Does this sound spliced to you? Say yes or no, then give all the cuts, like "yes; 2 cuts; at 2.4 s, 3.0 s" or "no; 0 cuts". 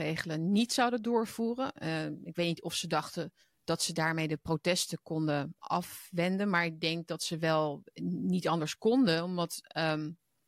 yes; 1 cut; at 3.4 s